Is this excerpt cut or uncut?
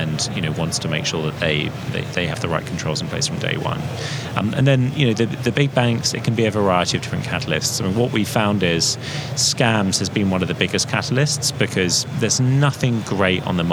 uncut